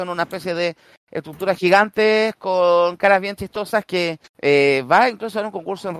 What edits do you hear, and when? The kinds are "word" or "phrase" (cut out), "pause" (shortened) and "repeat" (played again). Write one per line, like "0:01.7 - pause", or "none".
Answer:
0:04.3 - pause